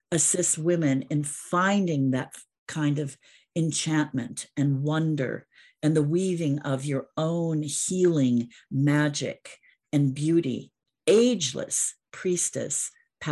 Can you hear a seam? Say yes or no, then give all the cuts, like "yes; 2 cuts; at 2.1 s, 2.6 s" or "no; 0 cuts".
no; 0 cuts